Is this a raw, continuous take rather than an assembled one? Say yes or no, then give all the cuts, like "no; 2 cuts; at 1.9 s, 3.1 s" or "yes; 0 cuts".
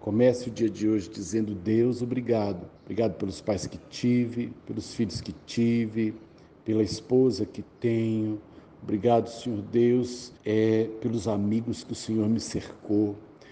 no; 3 cuts; at 2.8 s, 4.6 s, 10.4 s